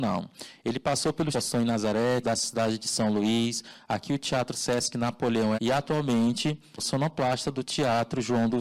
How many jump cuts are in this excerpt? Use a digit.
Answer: 4